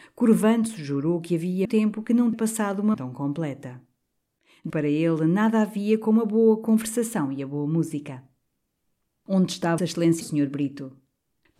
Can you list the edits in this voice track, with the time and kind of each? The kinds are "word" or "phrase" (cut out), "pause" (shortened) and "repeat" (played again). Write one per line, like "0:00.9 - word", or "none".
0:01.6 - word
0:02.3 - word
0:02.9 - word
0:04.7 - word
0:09.8 - word
0:10.2 - word